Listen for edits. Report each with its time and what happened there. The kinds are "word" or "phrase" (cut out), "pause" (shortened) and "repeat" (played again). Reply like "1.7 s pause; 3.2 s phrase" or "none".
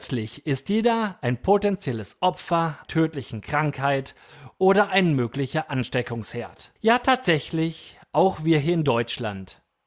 2.8 s word; 6.8 s pause